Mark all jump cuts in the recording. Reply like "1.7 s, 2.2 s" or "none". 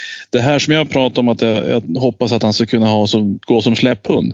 3.4 s

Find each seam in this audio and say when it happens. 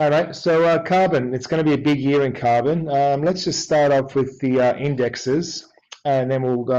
none

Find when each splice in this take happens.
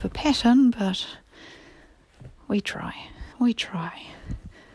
3.3 s

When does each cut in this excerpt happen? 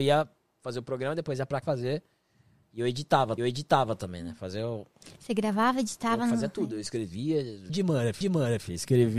1.6 s, 3.4 s, 7.7 s, 8.2 s

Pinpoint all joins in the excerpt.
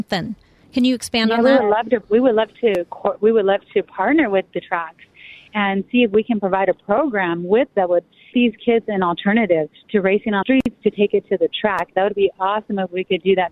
2.0 s, 7.7 s, 8.3 s, 10.4 s

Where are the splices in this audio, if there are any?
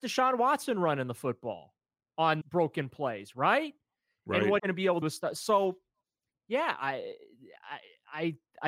2.4 s, 4.6 s, 5.0 s

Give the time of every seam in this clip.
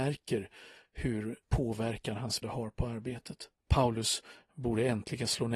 1.4 s, 2.4 s, 3.6 s

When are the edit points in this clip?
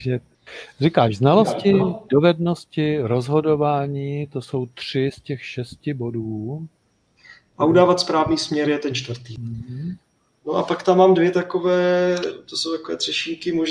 none

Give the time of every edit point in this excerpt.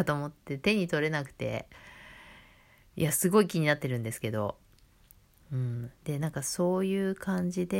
6.0 s

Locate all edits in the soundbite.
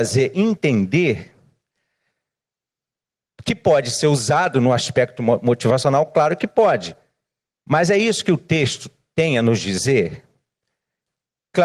none

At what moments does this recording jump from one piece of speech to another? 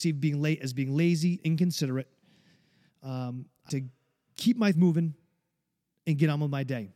1.4 s, 3.7 s, 4.7 s

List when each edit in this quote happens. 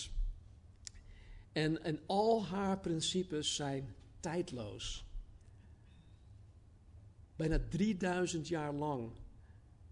none

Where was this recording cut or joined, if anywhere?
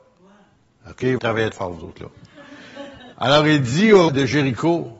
1.2 s, 1.5 s, 3.1 s, 4.1 s

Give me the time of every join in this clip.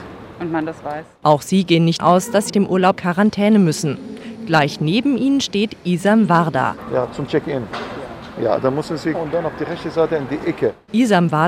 2.0 s, 2.5 s, 3.0 s, 9.1 s

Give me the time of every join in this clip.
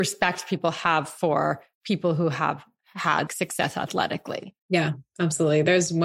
1.7 s, 3.3 s, 4.6 s

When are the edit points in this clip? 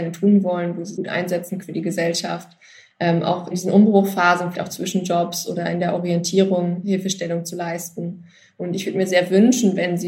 1.0 s, 1.6 s, 3.5 s, 4.5 s

